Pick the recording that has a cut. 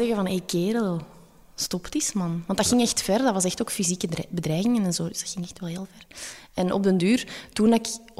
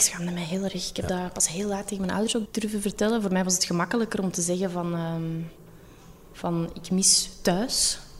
second; 1 cut; at 2.5 s

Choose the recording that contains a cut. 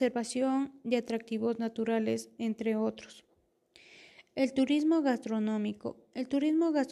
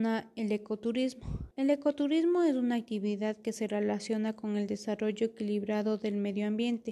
second; 1 cut; at 1.5 s

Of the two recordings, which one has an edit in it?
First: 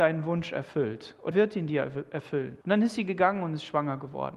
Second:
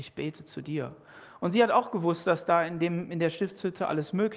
first; 2 cuts; at 1.3 s, 2.6 s

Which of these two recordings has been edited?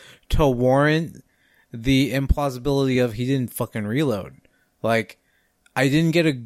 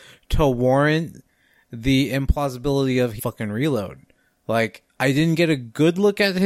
second; 2 cuts; at 3.2 s, 4.9 s

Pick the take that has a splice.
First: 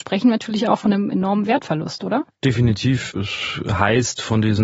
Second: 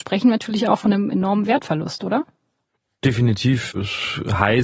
first; 1 cut; at 2.3 s

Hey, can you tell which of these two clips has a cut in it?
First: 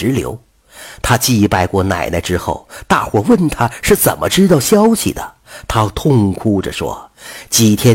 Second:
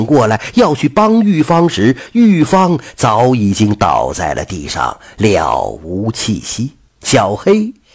second; 1 cut; at 6.9 s

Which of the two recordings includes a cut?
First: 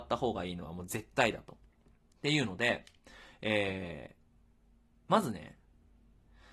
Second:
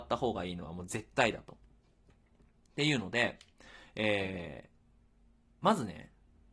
first; 1 cut; at 1.7 s

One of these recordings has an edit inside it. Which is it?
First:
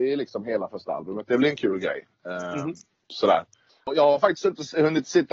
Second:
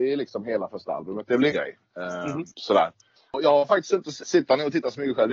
second; 3 cuts; at 1.5 s, 2.5 s, 4.2 s

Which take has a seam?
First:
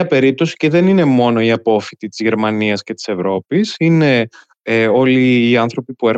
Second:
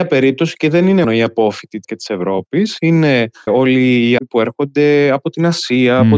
second; 4 cuts; at 1.0 s, 1.8 s, 3.5 s, 4.2 s

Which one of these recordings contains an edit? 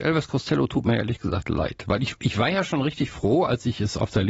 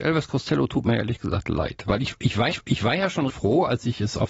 second; 2 cuts; at 2.5 s, 3.3 s

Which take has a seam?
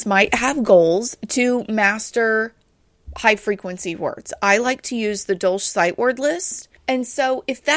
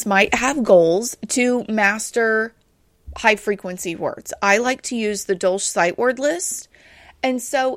first; 1 cut; at 6.8 s

